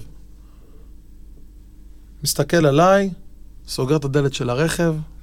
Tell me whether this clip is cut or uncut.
uncut